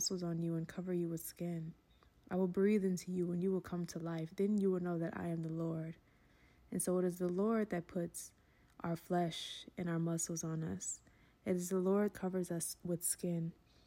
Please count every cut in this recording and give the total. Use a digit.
1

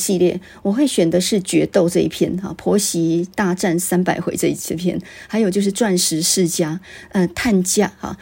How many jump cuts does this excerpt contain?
1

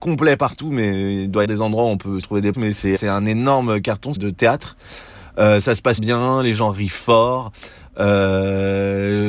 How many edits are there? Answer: 6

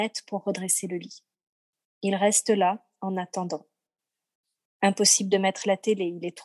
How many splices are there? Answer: 0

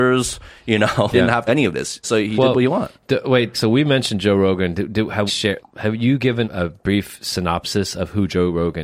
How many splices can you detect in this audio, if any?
8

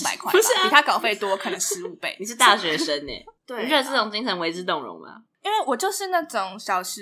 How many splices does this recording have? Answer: 1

